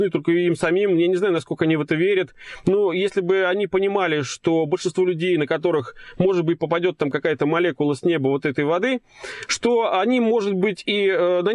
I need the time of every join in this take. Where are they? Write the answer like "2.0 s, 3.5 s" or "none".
none